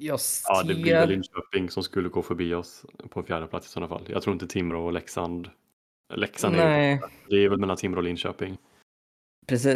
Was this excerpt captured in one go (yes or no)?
yes